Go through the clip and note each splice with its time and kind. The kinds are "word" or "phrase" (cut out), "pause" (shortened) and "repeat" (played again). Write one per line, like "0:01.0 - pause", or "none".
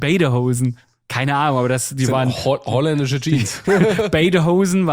none